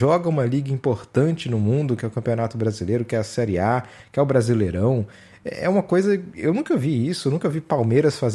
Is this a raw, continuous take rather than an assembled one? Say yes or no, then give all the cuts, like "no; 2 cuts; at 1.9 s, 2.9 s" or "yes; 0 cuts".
yes; 0 cuts